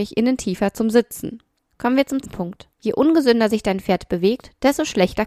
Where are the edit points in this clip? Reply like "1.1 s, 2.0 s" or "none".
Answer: 1.7 s, 2.2 s, 2.7 s